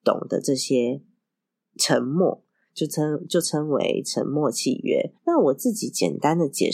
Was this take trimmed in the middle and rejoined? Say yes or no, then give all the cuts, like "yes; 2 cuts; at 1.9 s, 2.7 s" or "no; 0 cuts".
yes; 1 cut; at 5.2 s